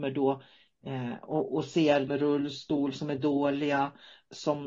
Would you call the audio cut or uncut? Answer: cut